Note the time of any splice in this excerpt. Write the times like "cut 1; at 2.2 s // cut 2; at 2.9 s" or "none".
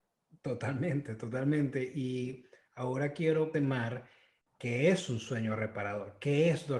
cut 1; at 3.5 s